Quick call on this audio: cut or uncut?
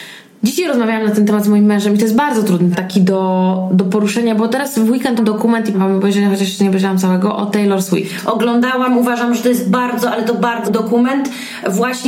cut